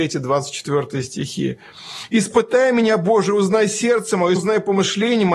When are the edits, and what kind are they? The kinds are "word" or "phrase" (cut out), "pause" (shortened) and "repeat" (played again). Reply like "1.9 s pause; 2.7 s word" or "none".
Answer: 4.4 s phrase